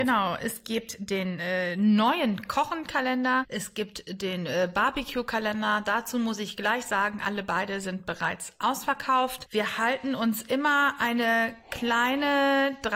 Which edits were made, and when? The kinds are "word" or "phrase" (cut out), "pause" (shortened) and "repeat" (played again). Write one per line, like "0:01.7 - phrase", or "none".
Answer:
none

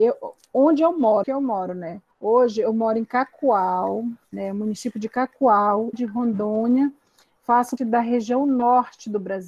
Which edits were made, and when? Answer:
0:01.2 - phrase
0:02.1 - pause
0:04.2 - pause
0:05.9 - word
0:07.8 - word

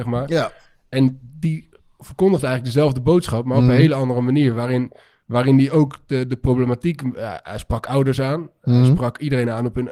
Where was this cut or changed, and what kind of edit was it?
none

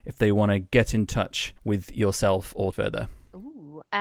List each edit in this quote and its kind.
0:01.6 - pause
0:02.7 - phrase

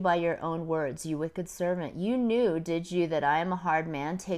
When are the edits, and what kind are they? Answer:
none

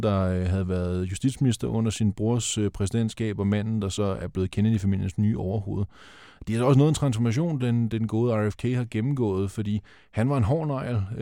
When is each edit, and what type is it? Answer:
none

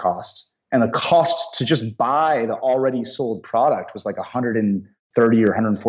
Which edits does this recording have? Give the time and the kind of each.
none

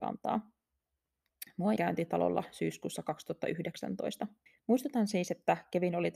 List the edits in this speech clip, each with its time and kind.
0:01.8 - phrase
0:04.5 - pause

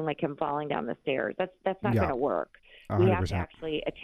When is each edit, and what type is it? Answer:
none

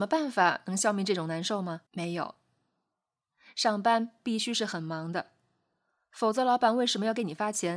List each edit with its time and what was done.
0:01.9 - pause

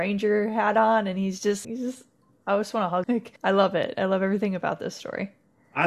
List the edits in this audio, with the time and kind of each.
0:01.6 - word
0:03.0 - word
0:03.4 - pause

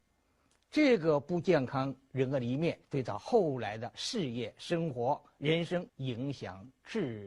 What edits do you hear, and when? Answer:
0:02.8 - pause
0:05.9 - pause

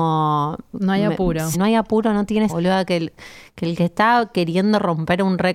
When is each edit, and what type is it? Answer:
0:01.5 - word
0:02.5 - phrase

